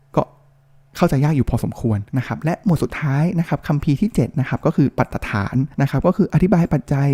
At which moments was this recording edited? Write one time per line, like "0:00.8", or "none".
0:02.1
0:05.7